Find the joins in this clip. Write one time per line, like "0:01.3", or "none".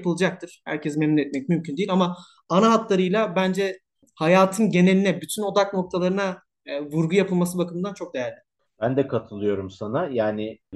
none